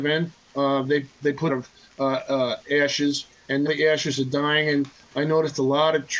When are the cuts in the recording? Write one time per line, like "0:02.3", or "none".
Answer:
0:01.5
0:03.7